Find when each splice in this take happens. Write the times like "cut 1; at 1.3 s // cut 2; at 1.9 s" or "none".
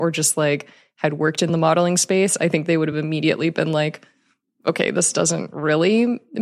none